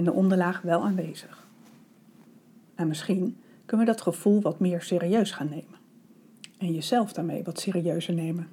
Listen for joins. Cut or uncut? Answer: uncut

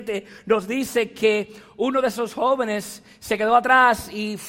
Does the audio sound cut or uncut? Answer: uncut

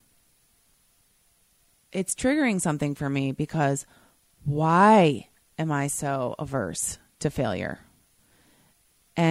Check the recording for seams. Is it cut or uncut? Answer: uncut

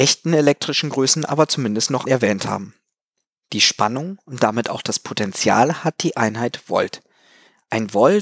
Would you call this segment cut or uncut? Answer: cut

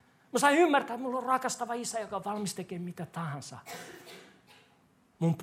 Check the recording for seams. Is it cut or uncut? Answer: uncut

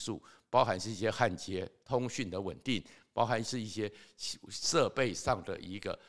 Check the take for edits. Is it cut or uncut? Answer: uncut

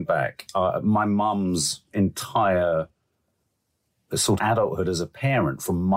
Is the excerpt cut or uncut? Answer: cut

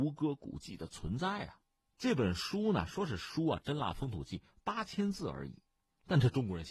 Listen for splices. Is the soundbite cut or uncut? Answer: uncut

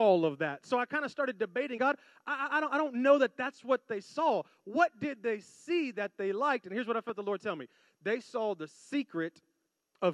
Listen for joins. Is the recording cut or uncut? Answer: cut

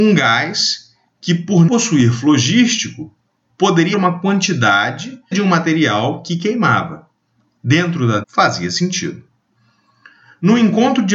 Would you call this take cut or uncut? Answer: cut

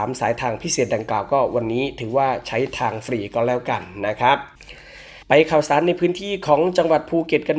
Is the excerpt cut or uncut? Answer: cut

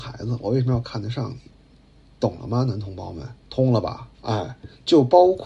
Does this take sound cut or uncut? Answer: cut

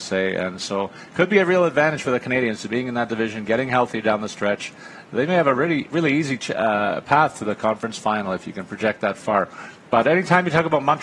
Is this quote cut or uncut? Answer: uncut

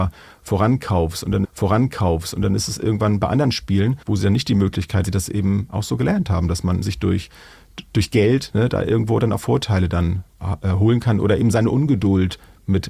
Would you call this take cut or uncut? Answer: cut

